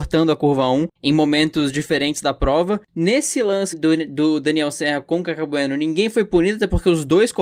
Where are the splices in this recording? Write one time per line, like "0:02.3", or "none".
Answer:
0:03.7